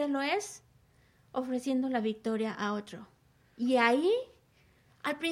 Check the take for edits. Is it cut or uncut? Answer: uncut